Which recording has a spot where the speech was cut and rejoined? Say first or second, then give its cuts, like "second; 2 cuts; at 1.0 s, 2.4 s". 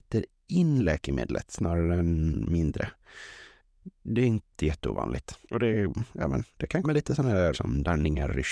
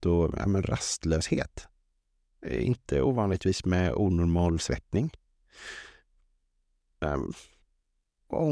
first; 3 cuts; at 5.4 s, 6.8 s, 7.5 s